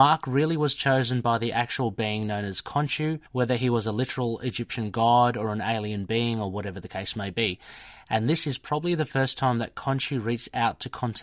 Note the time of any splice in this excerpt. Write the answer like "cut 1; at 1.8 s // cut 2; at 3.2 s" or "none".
cut 1; at 3.3 s

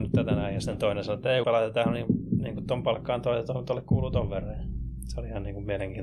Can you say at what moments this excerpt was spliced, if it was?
cut 1; at 1.4 s

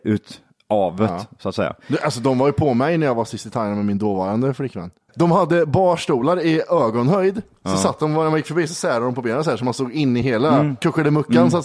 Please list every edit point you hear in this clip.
none

